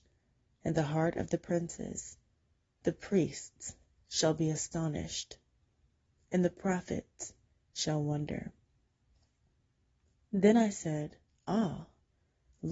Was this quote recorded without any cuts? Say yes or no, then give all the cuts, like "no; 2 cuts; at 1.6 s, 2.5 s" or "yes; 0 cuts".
yes; 0 cuts